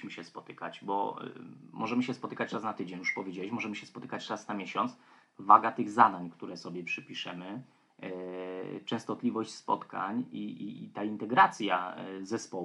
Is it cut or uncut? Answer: uncut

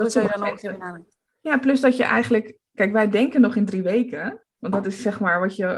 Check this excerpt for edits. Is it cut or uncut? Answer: uncut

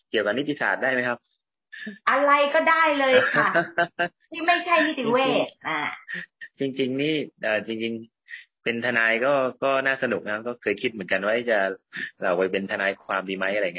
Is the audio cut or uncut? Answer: cut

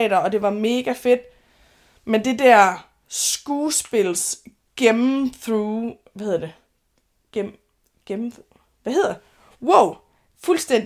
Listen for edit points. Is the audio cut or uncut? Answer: uncut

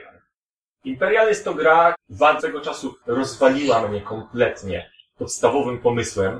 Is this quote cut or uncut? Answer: cut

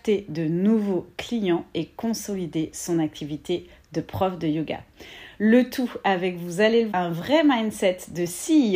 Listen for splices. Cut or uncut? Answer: cut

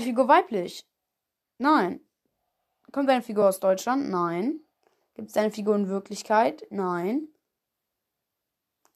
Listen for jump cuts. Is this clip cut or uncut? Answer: uncut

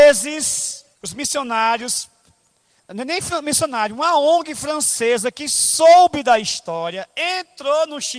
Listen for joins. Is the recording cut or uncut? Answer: cut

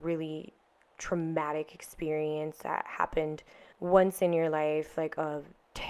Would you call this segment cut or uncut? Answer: cut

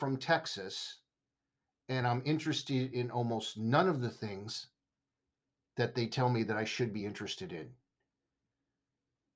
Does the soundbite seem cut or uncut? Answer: uncut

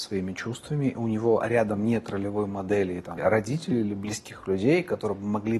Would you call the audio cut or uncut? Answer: cut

